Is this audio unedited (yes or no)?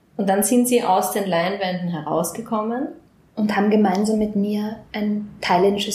no